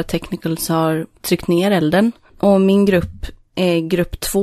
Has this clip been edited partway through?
no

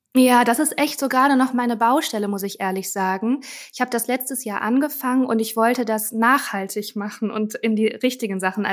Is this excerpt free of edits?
yes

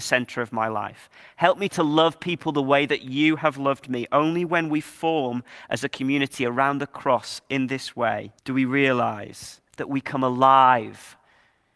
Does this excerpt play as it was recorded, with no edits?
no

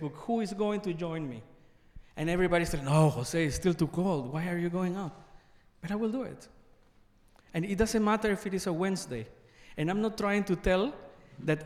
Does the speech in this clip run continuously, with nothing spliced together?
yes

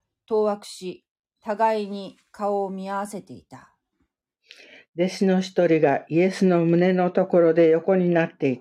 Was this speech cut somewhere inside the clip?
no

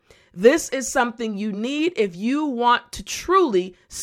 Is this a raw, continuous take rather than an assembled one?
yes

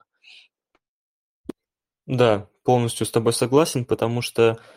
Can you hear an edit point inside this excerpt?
no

